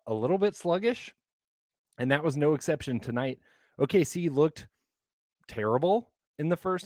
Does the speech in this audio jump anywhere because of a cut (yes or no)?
no